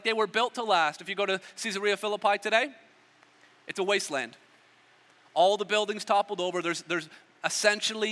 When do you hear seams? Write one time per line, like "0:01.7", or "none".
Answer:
none